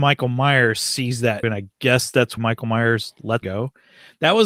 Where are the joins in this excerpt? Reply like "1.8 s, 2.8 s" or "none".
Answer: 1.4 s, 2.4 s, 3.4 s